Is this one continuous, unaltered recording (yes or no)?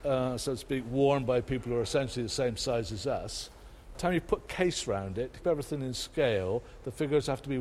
no